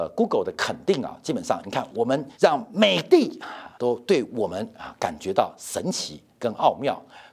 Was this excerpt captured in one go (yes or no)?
no